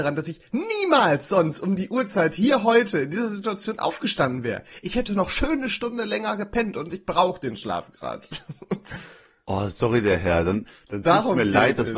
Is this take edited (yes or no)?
no